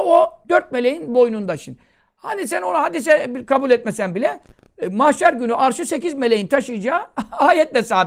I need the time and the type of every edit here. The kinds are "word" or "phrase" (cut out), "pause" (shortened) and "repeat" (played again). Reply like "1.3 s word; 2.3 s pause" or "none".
none